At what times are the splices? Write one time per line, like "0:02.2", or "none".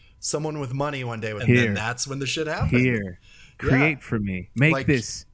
0:01.4